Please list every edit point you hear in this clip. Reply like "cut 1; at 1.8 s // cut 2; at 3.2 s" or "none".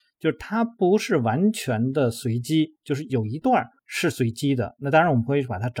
cut 1; at 3.8 s